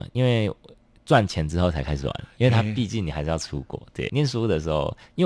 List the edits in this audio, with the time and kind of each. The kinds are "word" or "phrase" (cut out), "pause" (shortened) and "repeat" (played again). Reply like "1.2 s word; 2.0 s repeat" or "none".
4.1 s word